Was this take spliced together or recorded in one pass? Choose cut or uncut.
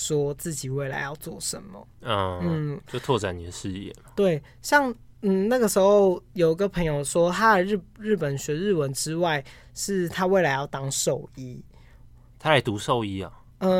uncut